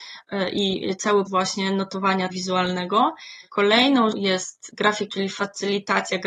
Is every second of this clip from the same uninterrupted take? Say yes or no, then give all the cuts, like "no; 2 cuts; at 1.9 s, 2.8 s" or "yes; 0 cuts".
no; 4 cuts; at 1.3 s, 2.3 s, 4.1 s, 5.1 s